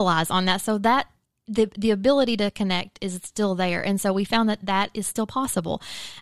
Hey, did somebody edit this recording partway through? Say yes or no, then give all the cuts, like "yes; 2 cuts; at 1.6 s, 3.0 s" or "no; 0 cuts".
no; 0 cuts